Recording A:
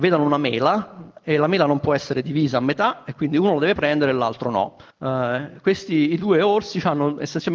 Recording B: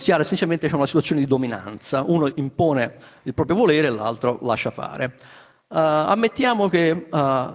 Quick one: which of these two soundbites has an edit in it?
A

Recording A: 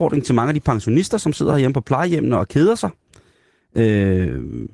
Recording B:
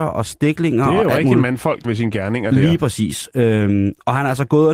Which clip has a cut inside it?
B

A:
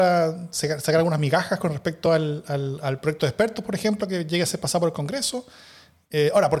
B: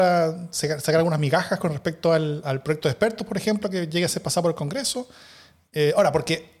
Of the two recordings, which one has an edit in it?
B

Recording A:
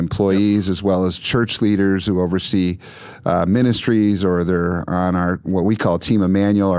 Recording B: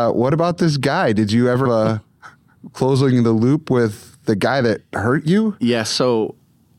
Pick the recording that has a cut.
B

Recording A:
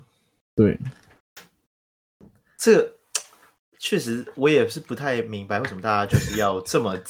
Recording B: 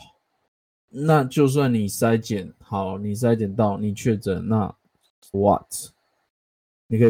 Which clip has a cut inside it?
B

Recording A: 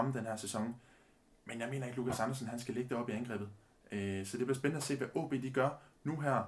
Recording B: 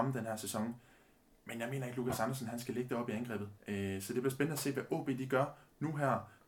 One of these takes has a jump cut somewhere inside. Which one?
B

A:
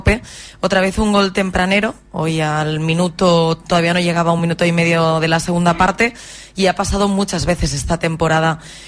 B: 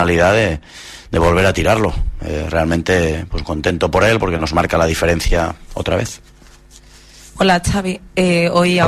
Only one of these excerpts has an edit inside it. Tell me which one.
B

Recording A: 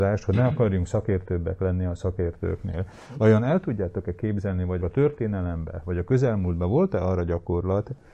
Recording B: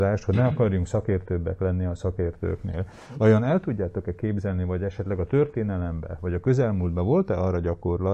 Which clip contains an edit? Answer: A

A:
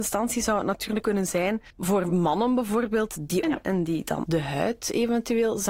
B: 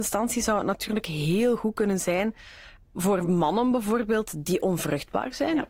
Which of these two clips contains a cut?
A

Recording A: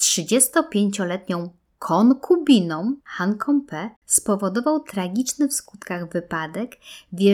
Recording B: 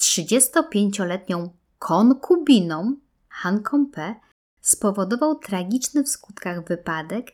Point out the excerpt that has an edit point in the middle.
A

